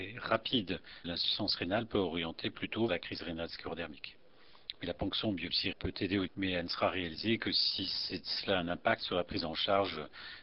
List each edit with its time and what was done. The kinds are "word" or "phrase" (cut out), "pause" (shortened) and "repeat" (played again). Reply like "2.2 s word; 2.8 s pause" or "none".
1.0 s word; 2.9 s word; 5.7 s word; 6.3 s word